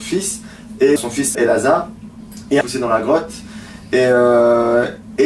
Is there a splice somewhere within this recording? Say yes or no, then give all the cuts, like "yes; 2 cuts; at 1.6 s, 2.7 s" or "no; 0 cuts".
yes; 3 cuts; at 1.0 s, 1.3 s, 2.6 s